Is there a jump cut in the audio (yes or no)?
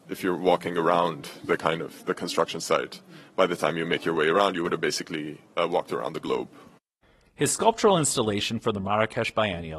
no